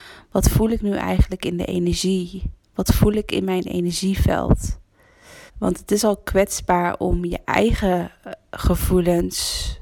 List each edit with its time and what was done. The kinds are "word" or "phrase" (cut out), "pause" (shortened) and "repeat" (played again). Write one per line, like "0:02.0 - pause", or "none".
0:02.6 - pause
0:05.5 - pause